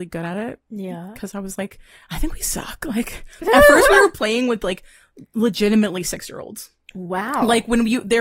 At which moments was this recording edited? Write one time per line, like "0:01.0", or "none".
none